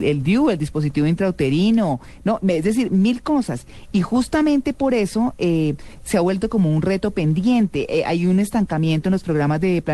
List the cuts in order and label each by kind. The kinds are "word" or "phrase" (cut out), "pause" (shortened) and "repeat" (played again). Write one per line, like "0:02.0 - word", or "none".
none